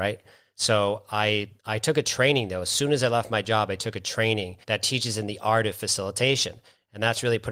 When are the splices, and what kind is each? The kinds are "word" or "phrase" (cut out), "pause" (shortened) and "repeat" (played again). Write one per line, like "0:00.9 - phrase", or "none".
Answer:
0:01.6 - pause
0:04.6 - pause